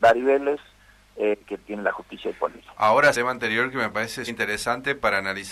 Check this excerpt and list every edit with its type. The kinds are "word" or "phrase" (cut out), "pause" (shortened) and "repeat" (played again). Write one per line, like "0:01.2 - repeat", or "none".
0:03.1 - phrase
0:04.3 - word